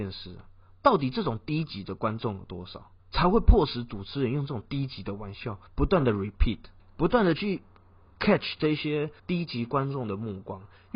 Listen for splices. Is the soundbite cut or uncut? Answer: cut